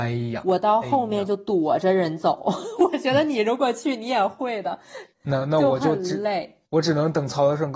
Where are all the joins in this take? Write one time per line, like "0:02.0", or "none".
0:05.1
0:06.7